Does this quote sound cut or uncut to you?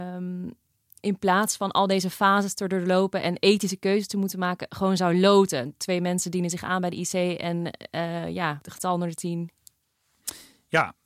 uncut